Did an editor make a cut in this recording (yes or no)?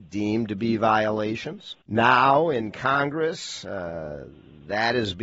yes